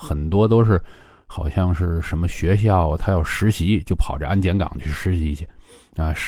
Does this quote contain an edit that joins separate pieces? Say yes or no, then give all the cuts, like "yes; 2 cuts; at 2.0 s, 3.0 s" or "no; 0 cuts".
no; 0 cuts